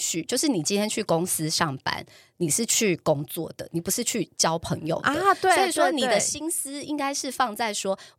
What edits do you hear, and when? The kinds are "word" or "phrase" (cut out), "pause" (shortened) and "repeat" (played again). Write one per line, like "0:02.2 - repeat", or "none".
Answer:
none

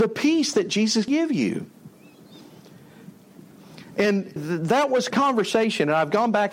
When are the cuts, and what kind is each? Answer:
0:01.1 - word
0:04.4 - word
0:05.1 - phrase

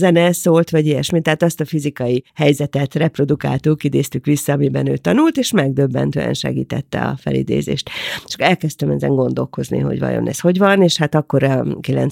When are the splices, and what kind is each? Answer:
0:02.3 - pause

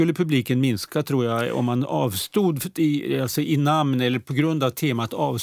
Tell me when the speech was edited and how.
none

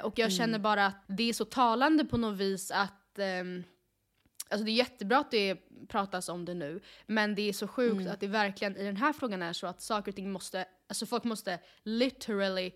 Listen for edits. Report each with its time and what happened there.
0:01.0 - word

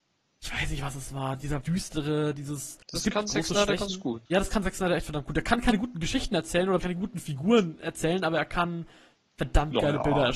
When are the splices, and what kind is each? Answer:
0:01.6 - phrase
0:02.8 - pause
0:04.3 - pause
0:06.8 - word

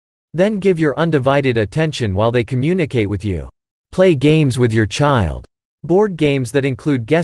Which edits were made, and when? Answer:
none

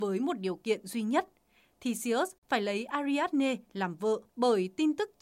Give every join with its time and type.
0:02.4 - pause
0:04.3 - pause

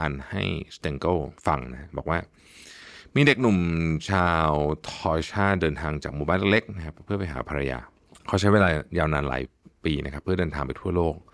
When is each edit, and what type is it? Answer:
none

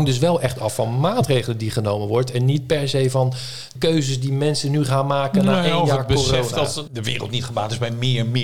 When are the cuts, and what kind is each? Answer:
0:03.8 - word

